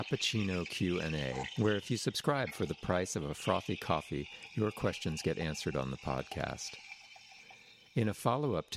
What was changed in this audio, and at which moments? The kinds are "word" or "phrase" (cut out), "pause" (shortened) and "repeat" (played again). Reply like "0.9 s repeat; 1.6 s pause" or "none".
none

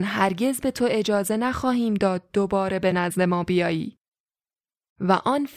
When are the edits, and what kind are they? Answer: none

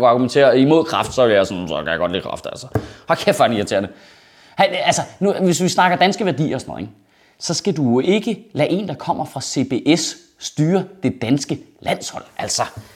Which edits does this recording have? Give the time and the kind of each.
none

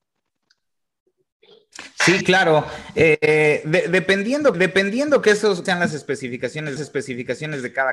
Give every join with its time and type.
4.5 s repeat; 5.7 s word; 6.8 s repeat

